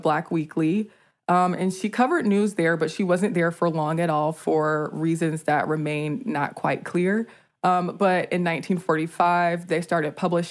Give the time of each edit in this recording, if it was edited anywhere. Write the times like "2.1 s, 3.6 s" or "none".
none